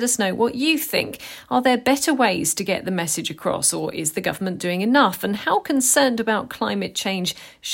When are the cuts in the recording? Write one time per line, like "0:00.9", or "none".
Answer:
none